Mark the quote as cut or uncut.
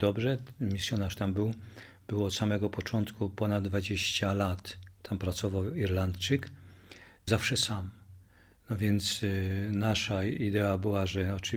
cut